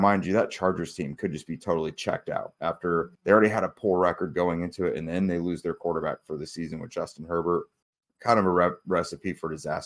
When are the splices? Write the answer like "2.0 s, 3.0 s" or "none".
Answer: 3.2 s, 7.8 s

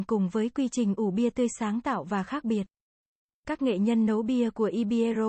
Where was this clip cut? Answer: none

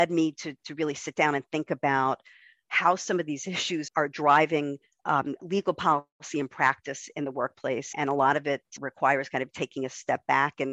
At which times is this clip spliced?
3.9 s, 5.4 s, 7.9 s, 8.8 s

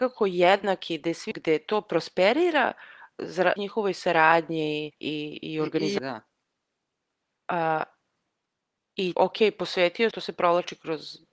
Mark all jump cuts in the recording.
1.3 s, 3.6 s, 4.9 s, 6.0 s, 9.1 s, 10.1 s

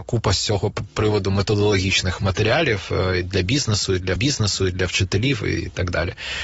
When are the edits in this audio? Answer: 4.2 s

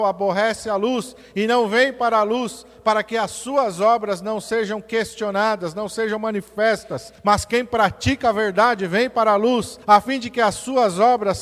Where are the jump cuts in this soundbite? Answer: 7.2 s, 9.8 s

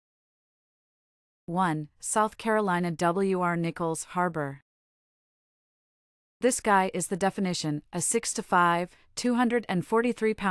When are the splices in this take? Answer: none

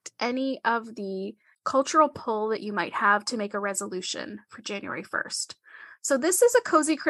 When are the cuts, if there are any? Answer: none

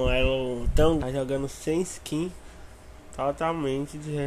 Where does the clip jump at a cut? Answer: 1.0 s

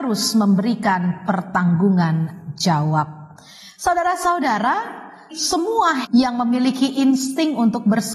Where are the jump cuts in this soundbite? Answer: 5.3 s, 6.0 s

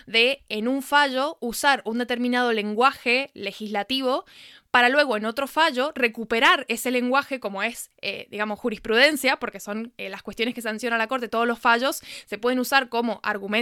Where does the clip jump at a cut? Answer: none

